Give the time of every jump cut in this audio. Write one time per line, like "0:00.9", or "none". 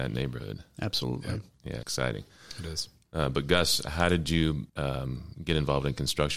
0:01.8
0:04.7